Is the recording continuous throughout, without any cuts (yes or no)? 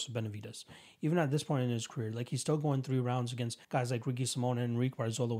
no